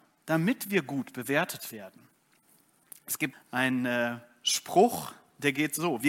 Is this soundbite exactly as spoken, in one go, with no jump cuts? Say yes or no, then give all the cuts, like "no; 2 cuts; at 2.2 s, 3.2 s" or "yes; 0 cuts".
no; 1 cut; at 3.3 s